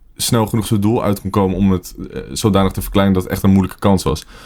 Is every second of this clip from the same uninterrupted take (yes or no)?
yes